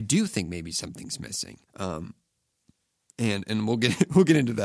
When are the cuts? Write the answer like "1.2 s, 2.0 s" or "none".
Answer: 1.7 s